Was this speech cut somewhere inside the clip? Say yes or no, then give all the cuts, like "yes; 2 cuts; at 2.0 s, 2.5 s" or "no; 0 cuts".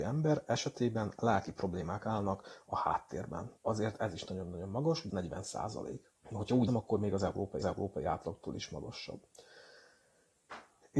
yes; 5 cuts; at 3.6 s, 5.1 s, 6.1 s, 6.7 s, 7.6 s